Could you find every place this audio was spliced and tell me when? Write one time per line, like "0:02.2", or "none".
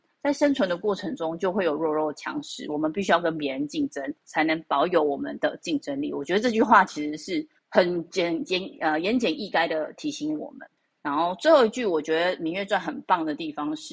0:04.2
0:07.6
0:10.8